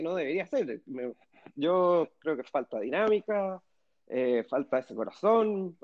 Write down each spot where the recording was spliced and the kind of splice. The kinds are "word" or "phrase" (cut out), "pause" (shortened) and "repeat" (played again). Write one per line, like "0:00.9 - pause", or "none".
none